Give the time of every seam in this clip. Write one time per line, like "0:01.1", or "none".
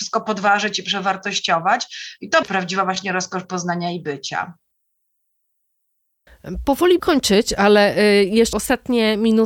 0:02.4
0:07.0
0:08.5